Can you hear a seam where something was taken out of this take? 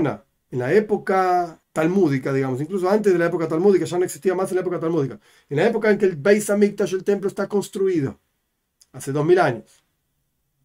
yes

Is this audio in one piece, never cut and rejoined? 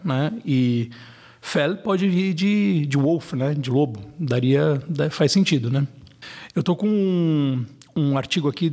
yes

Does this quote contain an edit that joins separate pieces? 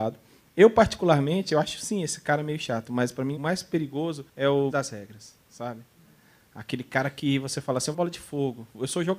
yes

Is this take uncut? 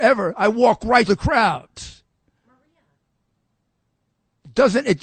no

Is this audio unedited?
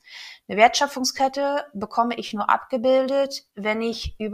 yes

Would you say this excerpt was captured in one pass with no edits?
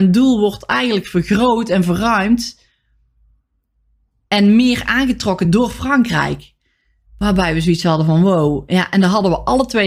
yes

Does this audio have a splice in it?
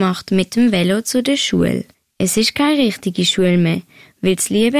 no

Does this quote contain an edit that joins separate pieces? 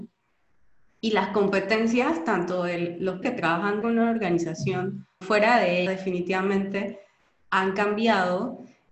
yes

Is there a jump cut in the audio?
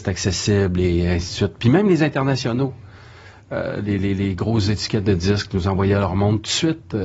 no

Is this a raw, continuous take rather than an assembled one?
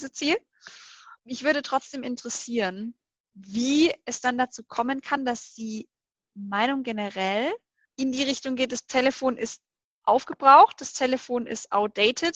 yes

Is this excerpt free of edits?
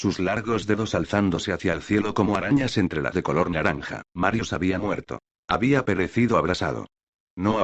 no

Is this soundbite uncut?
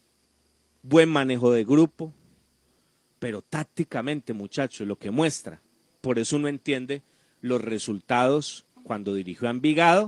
yes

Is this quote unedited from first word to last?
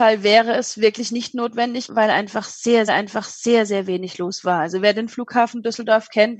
no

